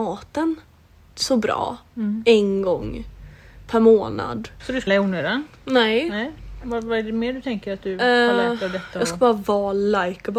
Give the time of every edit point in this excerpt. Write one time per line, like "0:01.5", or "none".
0:04.9